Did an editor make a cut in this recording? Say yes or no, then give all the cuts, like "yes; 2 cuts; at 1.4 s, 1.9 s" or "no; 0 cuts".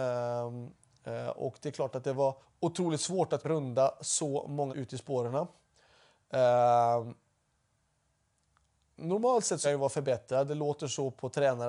yes; 4 cuts; at 2.4 s, 3.4 s, 4.7 s, 9.6 s